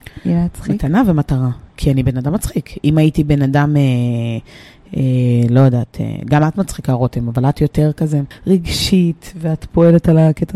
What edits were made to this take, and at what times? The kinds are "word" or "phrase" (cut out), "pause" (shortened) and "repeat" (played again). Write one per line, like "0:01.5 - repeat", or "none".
none